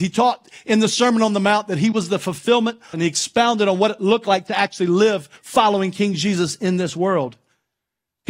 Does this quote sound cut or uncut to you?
cut